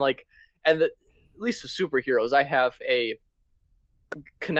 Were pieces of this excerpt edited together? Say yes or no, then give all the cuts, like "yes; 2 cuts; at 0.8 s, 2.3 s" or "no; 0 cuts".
no; 0 cuts